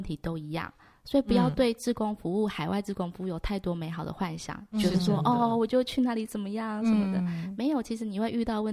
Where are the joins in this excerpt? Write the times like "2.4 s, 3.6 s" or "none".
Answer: none